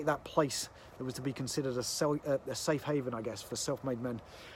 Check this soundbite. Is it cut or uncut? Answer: uncut